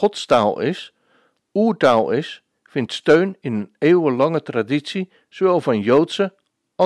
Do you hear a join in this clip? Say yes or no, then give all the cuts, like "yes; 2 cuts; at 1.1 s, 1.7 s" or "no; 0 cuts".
no; 0 cuts